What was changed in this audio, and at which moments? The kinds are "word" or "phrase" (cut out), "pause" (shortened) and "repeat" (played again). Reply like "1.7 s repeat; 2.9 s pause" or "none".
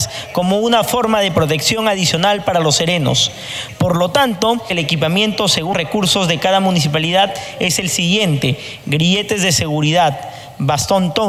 5.7 s word